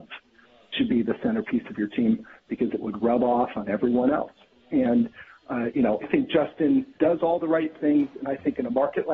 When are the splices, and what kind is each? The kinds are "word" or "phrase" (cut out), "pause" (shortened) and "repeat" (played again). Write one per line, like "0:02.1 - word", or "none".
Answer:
0:06.0 - word
0:07.0 - pause